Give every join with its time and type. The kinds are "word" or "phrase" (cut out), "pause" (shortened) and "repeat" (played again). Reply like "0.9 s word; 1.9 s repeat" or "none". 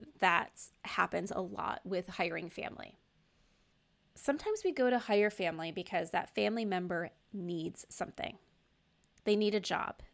none